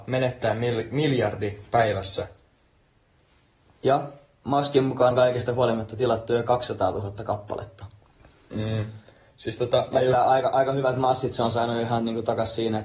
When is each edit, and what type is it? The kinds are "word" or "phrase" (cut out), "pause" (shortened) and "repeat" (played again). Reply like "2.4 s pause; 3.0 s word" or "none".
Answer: 5.1 s word